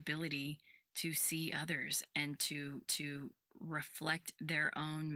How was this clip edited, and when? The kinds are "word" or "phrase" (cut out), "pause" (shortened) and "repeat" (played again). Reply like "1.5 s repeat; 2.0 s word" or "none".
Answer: 2.9 s repeat